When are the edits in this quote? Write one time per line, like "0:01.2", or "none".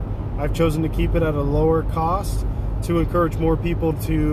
none

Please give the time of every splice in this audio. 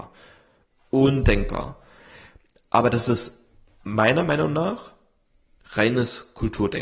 none

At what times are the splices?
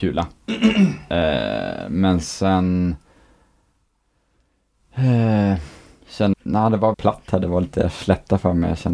0:06.3
0:06.9

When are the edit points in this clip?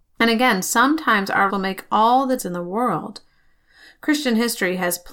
0:01.5
0:02.4

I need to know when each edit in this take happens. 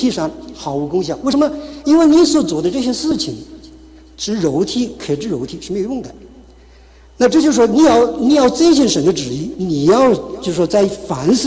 none

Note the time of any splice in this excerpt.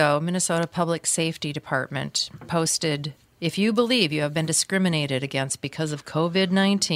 none

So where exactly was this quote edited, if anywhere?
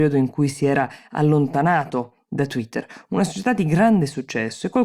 none

